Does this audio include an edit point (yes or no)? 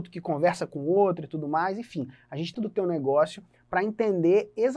yes